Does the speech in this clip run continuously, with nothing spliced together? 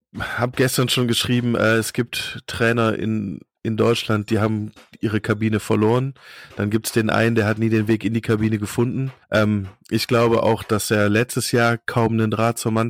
no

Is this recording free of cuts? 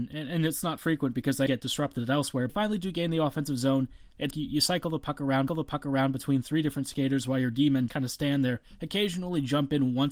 no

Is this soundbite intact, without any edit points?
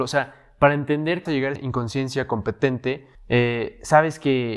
no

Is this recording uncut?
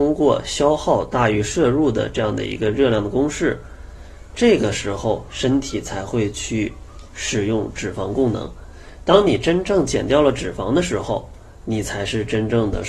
yes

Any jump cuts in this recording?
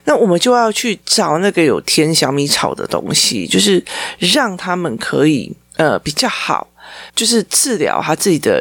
yes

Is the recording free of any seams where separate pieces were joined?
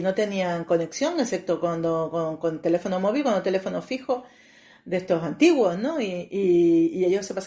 yes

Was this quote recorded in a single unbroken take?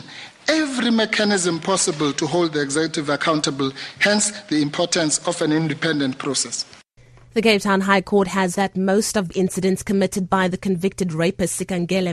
no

